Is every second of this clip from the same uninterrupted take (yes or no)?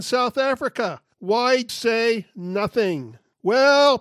no